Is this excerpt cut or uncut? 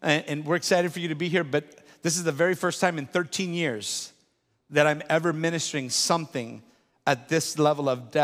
uncut